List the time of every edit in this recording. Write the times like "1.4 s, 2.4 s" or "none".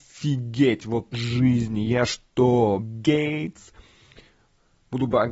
1.1 s, 2.8 s